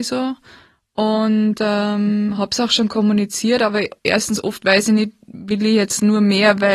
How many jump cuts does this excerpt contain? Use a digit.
1